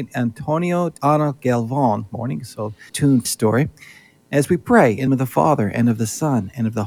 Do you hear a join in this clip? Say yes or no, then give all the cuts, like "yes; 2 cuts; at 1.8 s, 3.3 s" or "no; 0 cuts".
yes; 5 cuts; at 1.0 s, 2.1 s, 2.9 s, 3.2 s, 5.1 s